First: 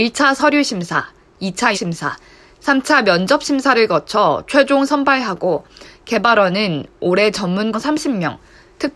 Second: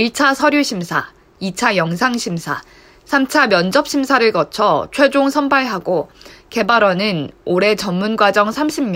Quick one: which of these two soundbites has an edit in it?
first; 2 cuts; at 1.7 s, 7.7 s

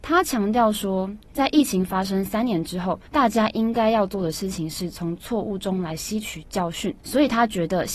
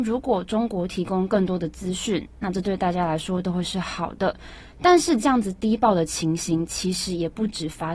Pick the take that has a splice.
first; 2 cuts; at 3.1 s, 7.0 s

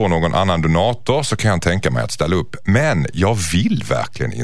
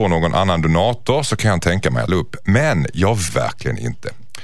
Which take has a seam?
second; 2 cuts; at 2.1 s, 3.3 s

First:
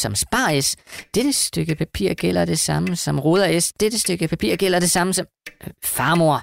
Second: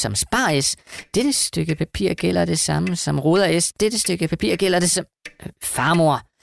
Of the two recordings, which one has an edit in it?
second; 1 cut; at 4.9 s

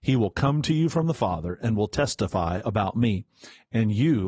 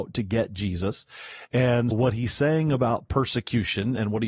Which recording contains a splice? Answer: second; 1 cut; at 1.9 s

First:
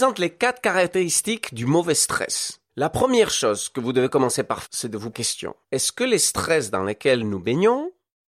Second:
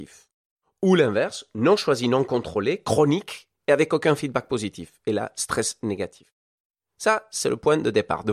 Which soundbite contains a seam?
first; 4 cuts; at 2.7 s, 4.6 s, 5.1 s, 5.6 s

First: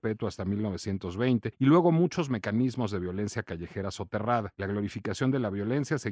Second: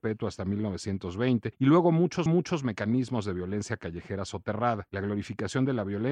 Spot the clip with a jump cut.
second; 1 cut; at 2.3 s

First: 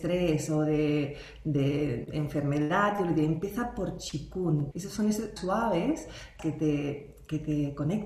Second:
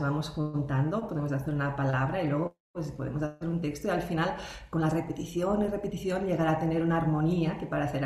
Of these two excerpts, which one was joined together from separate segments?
first; 3 cuts; at 4.7 s, 5.4 s, 6.4 s

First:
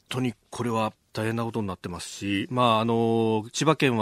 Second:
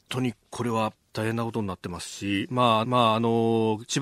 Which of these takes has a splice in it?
second; 1 cut; at 2.8 s

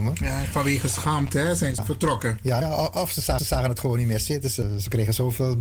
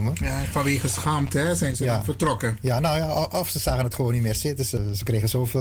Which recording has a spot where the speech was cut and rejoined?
first; 3 cuts; at 1.8 s, 2.6 s, 3.4 s

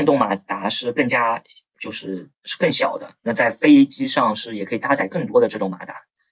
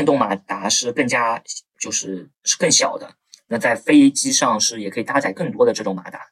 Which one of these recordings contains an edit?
first; 1 cut; at 3.2 s

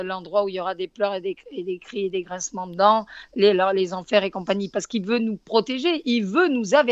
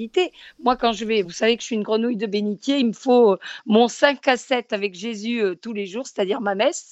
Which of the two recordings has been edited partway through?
second; 1 cut; at 1.2 s

